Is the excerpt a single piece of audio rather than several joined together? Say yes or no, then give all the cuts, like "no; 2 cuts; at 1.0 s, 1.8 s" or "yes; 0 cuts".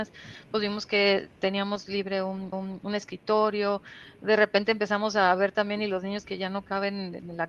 no; 1 cut; at 2.5 s